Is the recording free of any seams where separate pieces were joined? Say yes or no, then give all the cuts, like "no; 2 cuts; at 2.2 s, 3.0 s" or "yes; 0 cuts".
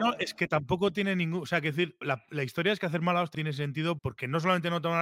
no; 3 cuts; at 2.0 s, 3.3 s, 4.0 s